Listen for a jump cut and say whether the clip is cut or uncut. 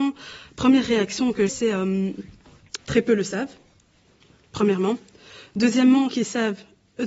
cut